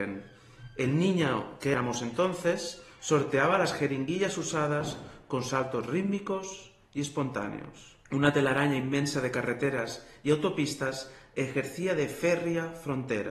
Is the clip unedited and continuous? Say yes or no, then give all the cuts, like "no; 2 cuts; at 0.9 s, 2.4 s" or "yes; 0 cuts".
no; 1 cut; at 8.1 s